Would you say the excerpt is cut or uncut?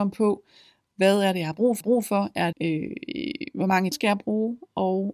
cut